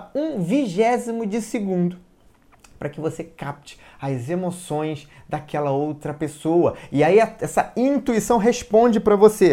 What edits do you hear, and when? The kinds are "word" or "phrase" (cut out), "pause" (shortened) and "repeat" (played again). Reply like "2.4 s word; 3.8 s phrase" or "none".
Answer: none